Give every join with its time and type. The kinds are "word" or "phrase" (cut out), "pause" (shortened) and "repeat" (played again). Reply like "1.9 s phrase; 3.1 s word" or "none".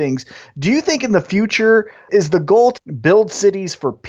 2.8 s word